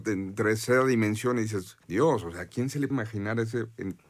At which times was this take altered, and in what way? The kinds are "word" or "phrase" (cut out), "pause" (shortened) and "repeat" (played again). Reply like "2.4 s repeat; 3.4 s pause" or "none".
1.8 s pause; 2.9 s word